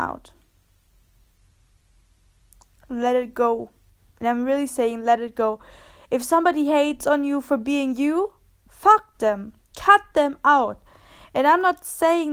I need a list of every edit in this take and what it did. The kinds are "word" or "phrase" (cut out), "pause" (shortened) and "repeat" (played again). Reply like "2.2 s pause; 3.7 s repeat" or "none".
none